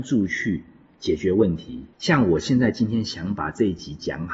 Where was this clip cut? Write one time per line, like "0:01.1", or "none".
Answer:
0:01.9